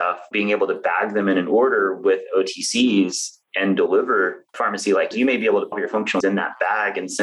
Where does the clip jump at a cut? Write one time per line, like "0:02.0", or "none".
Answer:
0:04.5
0:05.1
0:05.7
0:06.2